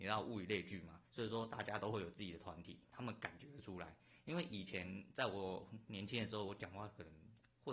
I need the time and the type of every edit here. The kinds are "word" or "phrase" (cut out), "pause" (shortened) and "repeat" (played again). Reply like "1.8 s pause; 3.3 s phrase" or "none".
1.1 s pause